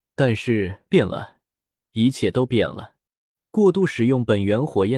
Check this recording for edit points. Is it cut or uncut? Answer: uncut